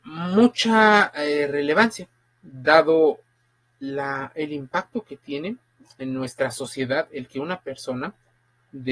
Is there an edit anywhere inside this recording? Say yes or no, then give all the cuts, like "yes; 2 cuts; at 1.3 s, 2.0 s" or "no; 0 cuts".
no; 0 cuts